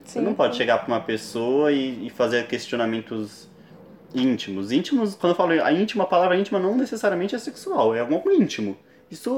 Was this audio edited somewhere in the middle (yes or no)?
no